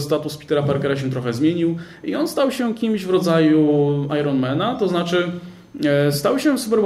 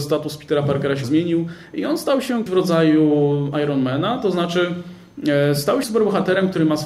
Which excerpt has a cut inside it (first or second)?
second